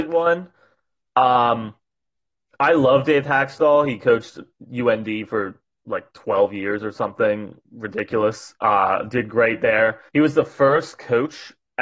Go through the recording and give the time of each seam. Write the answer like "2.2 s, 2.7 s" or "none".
7.6 s, 10.1 s